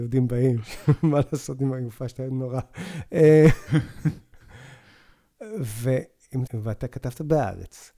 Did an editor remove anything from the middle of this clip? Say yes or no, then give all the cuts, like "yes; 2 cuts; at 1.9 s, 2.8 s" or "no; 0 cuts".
yes; 1 cut; at 6.5 s